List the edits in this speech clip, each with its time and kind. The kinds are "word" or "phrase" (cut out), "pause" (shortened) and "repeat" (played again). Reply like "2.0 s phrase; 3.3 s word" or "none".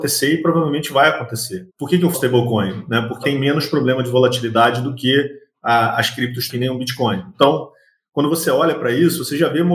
1.7 s pause; 2.1 s word; 3.2 s word; 6.5 s word